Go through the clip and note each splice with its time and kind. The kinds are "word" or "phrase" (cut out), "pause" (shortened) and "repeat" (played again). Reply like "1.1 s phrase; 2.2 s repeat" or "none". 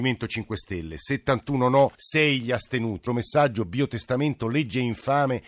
1.9 s pause; 3.1 s word